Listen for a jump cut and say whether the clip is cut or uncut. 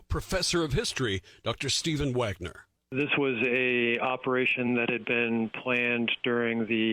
uncut